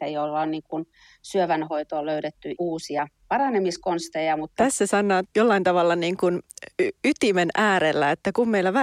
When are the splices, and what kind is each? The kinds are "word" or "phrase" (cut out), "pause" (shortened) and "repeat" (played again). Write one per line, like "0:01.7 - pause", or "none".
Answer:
0:02.5 - word
0:05.2 - word